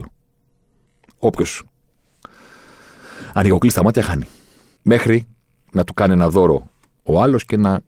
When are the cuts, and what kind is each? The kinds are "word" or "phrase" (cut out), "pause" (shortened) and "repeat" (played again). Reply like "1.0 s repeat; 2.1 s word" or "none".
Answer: none